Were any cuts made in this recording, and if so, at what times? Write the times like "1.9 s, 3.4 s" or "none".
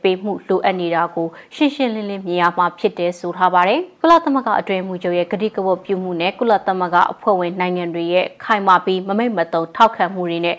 4.0 s